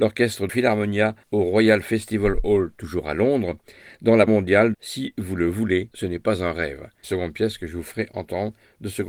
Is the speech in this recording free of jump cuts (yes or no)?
no